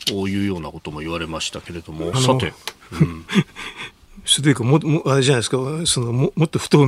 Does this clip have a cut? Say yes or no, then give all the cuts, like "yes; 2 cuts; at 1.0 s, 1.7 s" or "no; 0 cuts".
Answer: yes; 1 cut; at 2.1 s